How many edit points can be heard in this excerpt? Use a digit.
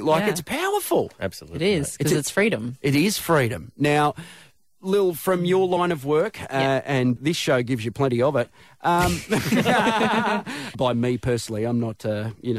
2